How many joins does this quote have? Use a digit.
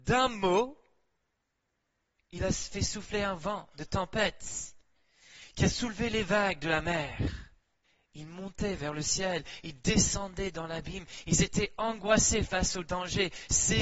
1